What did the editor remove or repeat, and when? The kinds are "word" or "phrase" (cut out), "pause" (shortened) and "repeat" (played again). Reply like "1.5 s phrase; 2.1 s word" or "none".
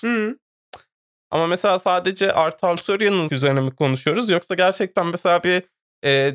3.3 s word